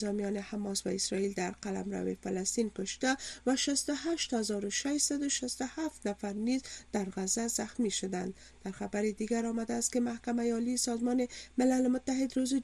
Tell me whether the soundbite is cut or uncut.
uncut